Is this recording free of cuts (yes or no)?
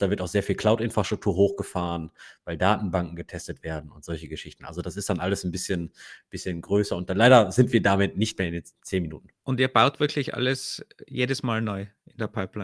yes